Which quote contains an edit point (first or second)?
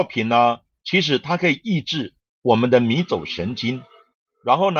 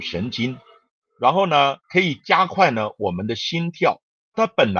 second